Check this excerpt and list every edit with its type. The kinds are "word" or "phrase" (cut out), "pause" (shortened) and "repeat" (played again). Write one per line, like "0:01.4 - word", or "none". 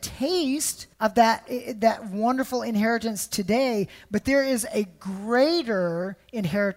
0:00.9 - pause